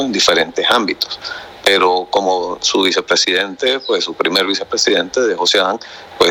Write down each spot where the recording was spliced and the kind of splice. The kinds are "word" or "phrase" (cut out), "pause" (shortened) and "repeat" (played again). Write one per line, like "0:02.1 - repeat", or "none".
none